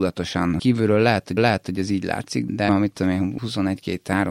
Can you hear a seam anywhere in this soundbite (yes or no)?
yes